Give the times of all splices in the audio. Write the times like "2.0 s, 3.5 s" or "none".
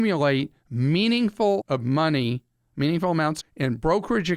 1.6 s, 3.4 s